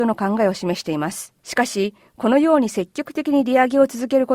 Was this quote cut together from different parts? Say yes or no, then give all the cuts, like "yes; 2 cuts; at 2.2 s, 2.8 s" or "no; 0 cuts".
yes; 1 cut; at 1.4 s